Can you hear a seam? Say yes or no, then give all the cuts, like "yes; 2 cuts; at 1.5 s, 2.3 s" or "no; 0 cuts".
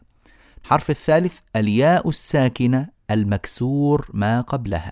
no; 0 cuts